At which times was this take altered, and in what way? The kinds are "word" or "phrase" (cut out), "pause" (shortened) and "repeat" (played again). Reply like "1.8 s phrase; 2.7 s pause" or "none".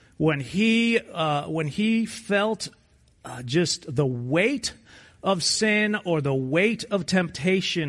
none